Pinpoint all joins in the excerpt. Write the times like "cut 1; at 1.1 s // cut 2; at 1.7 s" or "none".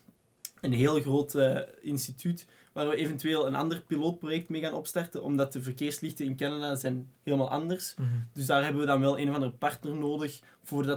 none